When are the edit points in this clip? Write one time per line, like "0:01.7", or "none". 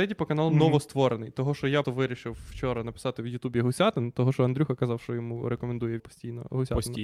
0:01.8
0:06.0